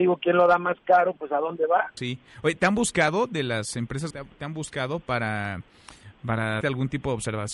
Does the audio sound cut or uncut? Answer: cut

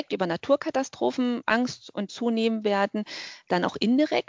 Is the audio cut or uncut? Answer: cut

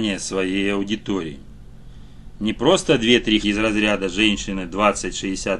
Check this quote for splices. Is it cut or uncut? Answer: cut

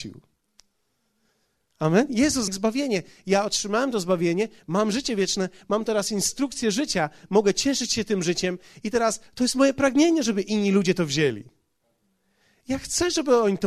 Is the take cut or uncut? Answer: cut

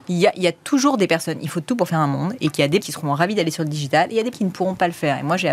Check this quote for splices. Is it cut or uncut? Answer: cut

